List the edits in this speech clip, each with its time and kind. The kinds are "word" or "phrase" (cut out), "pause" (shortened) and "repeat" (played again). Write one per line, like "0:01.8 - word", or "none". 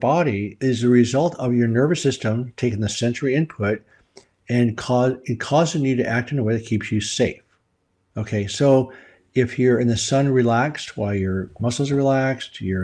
none